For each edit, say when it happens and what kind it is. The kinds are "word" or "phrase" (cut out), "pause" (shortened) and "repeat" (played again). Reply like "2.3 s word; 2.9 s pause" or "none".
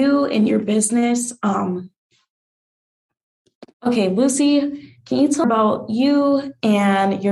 3.7 s pause; 5.4 s phrase